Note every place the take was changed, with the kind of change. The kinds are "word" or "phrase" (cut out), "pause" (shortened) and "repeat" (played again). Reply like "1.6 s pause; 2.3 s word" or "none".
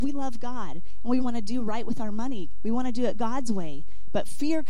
1.2 s word